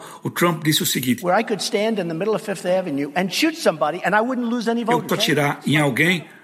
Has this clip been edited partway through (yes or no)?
yes